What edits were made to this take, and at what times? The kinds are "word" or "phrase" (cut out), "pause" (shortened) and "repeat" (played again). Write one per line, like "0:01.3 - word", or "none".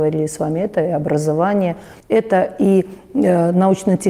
0:02.0 - pause